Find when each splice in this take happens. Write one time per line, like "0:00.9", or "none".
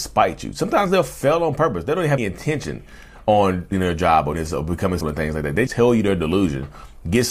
0:02.2
0:03.7
0:04.3
0:05.0
0:05.7